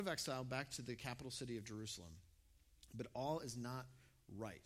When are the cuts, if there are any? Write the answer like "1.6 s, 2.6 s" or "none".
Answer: none